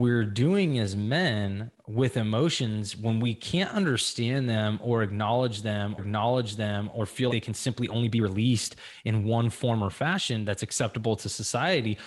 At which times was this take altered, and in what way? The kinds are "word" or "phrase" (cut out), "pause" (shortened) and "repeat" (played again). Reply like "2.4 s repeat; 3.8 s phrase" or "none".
6.0 s repeat; 7.3 s word